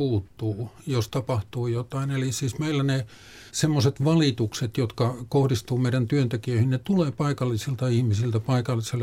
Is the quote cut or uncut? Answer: cut